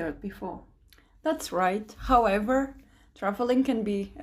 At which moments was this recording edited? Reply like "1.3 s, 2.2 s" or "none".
none